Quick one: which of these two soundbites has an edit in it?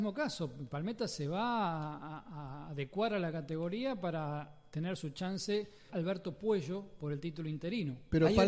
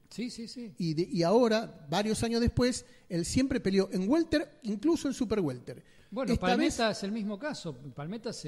first; 1 cut; at 5.9 s

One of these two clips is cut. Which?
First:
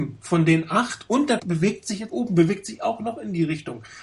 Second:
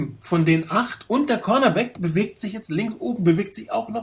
first; 2 cuts; at 1.4 s, 2.1 s

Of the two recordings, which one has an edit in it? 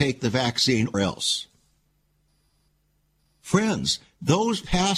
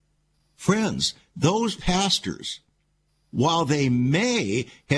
first; 1 cut; at 0.9 s

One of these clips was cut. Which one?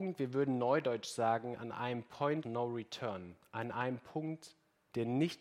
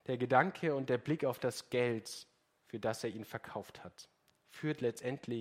first; 1 cut; at 2.4 s

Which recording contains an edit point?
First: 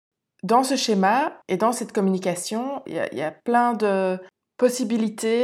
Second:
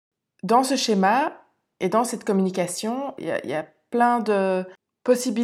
first; 2 cuts; at 1.4 s, 3.4 s

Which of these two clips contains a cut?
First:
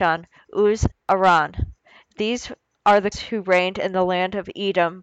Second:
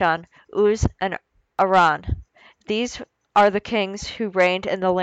first; 2 cuts; at 0.9 s, 3.1 s

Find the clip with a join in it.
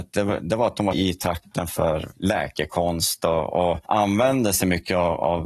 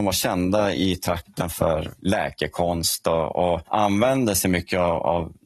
first; 1 cut; at 0.9 s

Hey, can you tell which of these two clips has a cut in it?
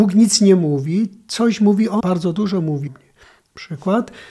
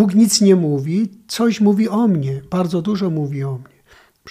first; 2 cuts; at 2.0 s, 2.9 s

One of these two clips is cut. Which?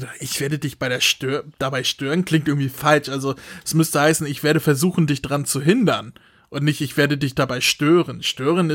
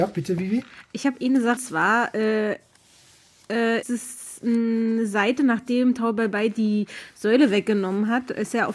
second; 2 cuts; at 1.6 s, 3.8 s

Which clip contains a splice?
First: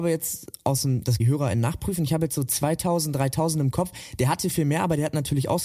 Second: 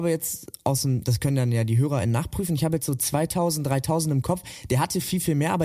first; 2 cuts; at 1.2 s, 4.5 s

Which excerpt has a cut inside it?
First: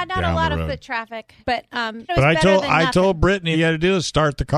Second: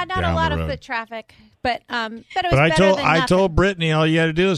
first; 3 cuts; at 1.4 s, 2.1 s, 3.5 s

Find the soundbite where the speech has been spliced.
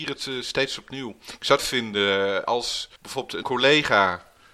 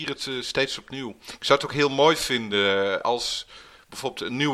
first; 3 cuts; at 1.6 s, 3.0 s, 3.4 s

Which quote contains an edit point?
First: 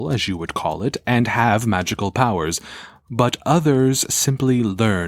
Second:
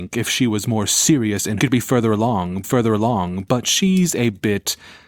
second; 2 cuts; at 1.6 s, 2.6 s

